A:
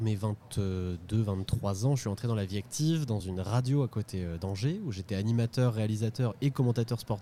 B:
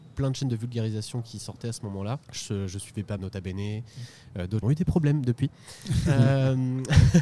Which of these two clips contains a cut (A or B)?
B